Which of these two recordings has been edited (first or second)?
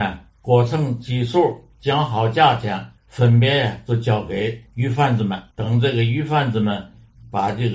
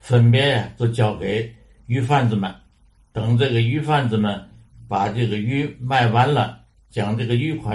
first